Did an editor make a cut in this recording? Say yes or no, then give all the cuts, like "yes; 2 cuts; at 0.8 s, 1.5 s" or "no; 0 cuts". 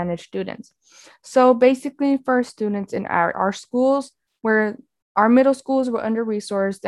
yes; 2 cuts; at 3.3 s, 5.0 s